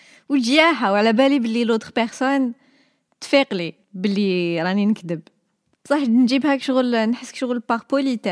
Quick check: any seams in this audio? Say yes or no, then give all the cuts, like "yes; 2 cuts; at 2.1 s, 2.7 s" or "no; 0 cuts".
yes; 1 cut; at 3.8 s